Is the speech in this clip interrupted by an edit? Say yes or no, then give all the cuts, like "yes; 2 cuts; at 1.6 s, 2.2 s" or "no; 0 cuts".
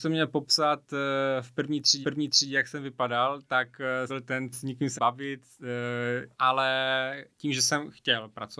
yes; 5 cuts; at 2.0 s, 4.1 s, 4.5 s, 5.0 s, 6.3 s